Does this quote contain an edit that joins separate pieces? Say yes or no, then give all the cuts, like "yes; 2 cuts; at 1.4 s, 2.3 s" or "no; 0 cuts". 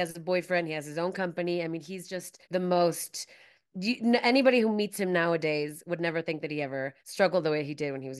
yes; 2 cuts; at 2.4 s, 7.0 s